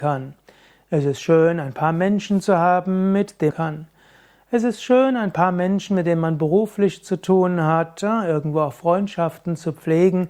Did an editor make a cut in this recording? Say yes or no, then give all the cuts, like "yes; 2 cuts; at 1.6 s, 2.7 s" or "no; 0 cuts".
yes; 1 cut; at 3.5 s